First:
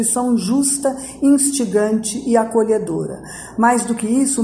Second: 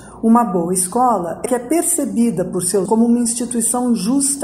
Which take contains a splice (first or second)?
second